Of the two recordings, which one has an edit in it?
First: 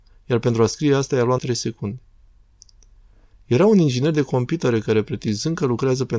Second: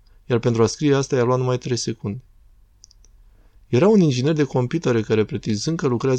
first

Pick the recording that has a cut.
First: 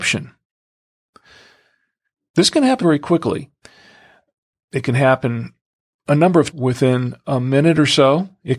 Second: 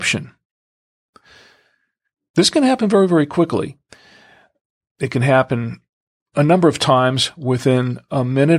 first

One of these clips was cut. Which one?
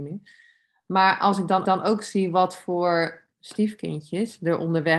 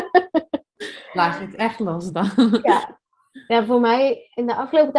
first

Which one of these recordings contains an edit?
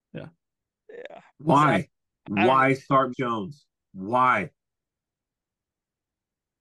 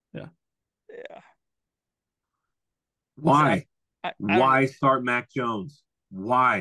first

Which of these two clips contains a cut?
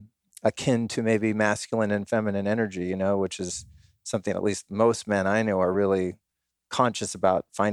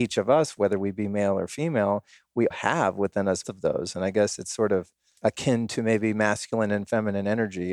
second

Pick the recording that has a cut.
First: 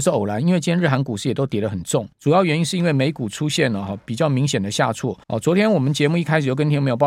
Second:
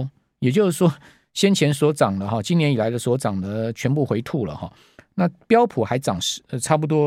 first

